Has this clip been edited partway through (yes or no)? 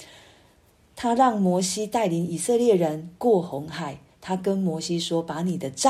no